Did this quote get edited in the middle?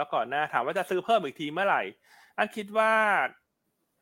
no; 0 cuts

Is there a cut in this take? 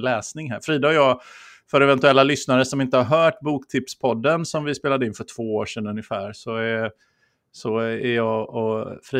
no; 0 cuts

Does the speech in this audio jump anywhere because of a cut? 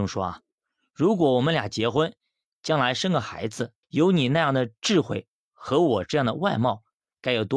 yes; 1 cut; at 3.8 s

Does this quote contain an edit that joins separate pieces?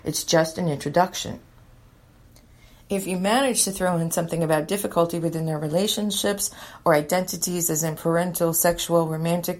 no; 0 cuts

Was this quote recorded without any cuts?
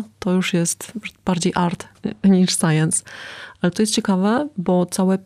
yes; 0 cuts

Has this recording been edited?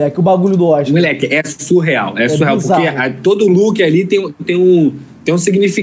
no; 0 cuts

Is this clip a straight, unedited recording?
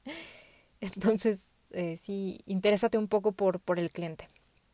yes; 0 cuts

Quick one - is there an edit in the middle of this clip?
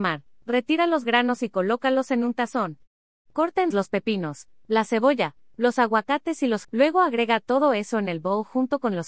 yes; 2 cuts; at 3.7 s, 6.6 s

